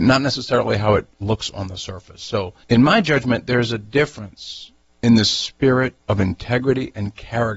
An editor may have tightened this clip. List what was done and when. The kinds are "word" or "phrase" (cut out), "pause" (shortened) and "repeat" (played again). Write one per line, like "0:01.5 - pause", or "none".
0:02.6 - pause
0:04.8 - pause
0:06.0 - pause